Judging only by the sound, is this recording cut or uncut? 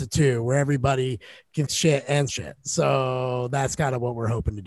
cut